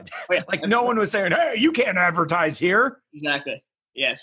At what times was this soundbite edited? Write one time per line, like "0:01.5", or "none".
none